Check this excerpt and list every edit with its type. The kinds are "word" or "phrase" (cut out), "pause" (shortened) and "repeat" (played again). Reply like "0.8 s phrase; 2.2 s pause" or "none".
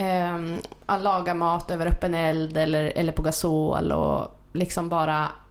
none